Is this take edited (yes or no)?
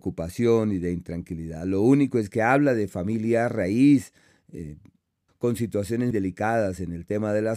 yes